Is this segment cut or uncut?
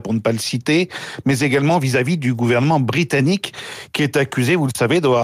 uncut